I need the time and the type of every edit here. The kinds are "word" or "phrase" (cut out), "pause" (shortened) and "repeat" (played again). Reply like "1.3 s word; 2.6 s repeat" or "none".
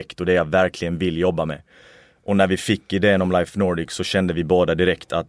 none